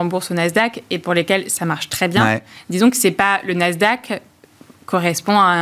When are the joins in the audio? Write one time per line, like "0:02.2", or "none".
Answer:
none